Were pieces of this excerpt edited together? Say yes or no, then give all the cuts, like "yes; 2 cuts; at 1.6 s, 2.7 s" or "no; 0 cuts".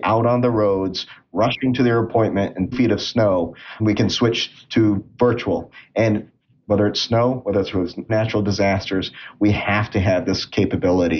yes; 4 cuts; at 2.7 s, 3.8 s, 7.7 s, 8.1 s